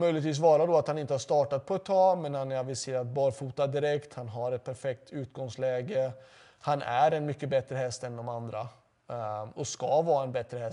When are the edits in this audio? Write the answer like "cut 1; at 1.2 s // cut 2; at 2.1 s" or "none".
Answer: none